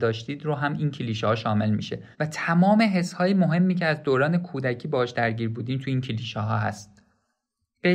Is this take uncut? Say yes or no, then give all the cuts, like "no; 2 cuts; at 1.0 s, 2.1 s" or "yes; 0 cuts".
no; 1 cut; at 2.1 s